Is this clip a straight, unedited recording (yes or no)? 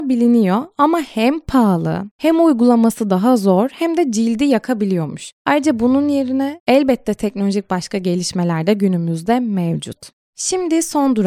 yes